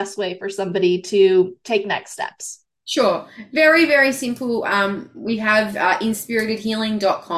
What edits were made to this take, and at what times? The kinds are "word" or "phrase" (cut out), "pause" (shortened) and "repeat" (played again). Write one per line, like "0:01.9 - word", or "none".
none